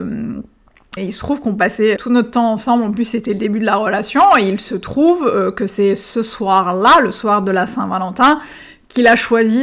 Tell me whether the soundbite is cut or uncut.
cut